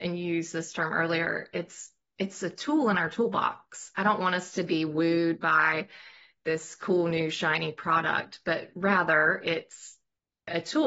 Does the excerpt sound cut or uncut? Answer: uncut